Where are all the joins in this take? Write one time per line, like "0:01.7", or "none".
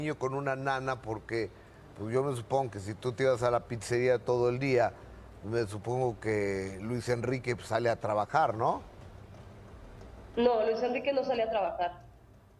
none